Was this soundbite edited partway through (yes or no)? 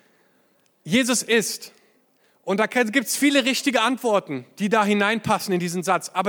no